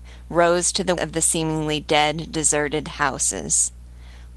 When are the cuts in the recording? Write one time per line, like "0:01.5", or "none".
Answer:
0:01.0